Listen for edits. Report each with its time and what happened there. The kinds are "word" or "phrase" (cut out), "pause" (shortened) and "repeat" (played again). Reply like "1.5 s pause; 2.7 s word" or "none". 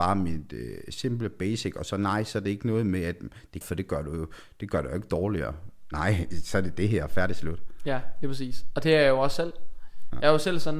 3.6 s phrase